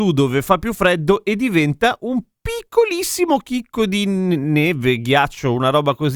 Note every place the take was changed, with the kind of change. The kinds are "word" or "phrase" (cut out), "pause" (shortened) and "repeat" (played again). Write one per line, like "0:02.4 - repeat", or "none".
none